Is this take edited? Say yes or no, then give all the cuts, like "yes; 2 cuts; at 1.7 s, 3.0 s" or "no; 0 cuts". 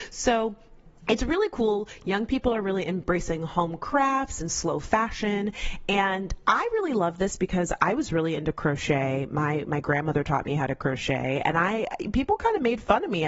no; 0 cuts